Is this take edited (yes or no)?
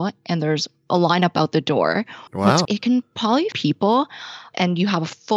yes